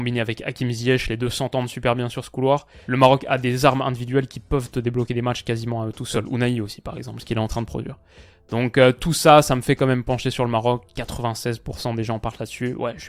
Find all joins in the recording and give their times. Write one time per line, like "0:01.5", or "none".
none

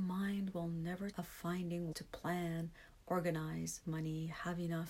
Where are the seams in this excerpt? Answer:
0:01.1
0:01.9
0:03.8

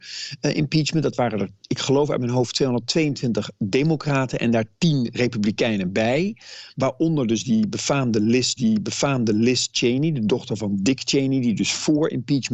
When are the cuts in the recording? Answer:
0:08.6

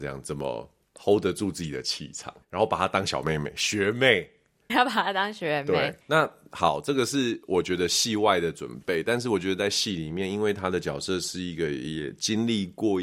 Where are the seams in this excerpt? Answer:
0:02.4
0:04.7
0:06.0

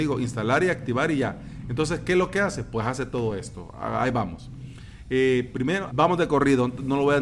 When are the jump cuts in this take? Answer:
0:05.9

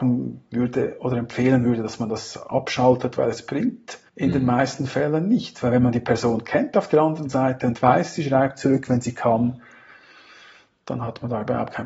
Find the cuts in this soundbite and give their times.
0:04.1

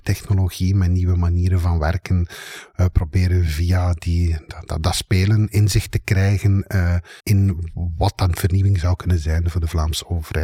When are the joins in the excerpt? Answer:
0:07.2

